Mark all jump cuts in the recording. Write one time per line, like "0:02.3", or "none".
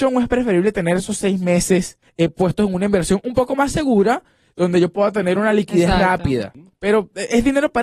none